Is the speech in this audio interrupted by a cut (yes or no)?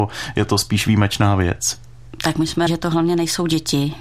yes